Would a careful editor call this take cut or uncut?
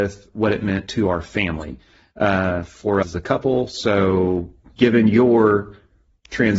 cut